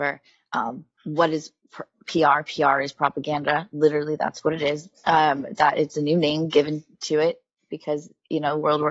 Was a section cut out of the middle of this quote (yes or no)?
yes